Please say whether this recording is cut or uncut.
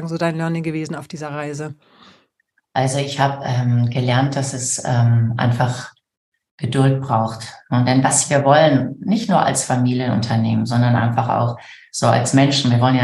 uncut